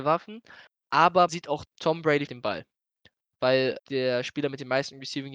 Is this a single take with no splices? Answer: no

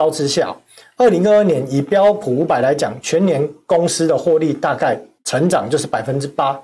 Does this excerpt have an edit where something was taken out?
yes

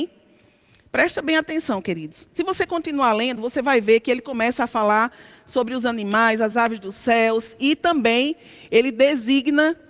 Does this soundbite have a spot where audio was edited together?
no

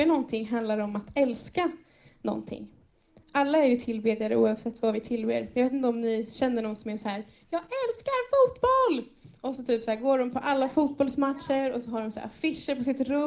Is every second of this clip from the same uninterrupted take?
yes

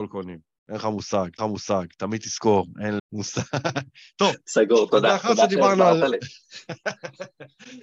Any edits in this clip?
yes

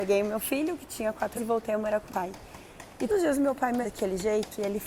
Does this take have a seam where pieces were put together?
yes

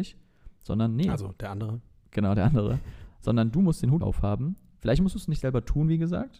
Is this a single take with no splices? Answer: no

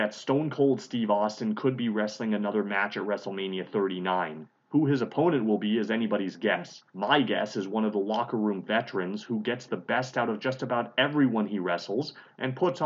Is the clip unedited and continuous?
no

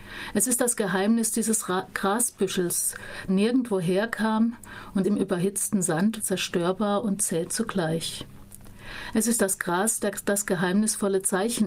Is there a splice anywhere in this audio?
yes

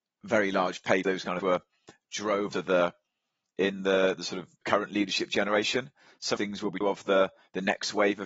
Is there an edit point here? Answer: yes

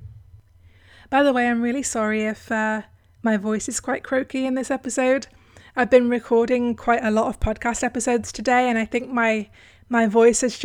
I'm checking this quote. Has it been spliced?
no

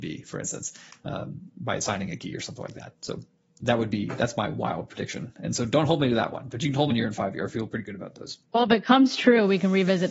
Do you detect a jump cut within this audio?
yes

